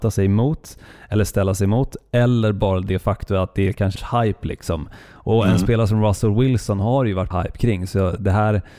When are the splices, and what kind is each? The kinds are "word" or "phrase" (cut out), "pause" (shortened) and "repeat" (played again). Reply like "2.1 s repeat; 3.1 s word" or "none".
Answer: 4.0 s phrase; 7.3 s word